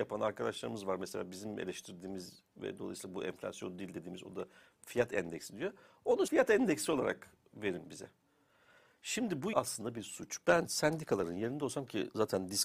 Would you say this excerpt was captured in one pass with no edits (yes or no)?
no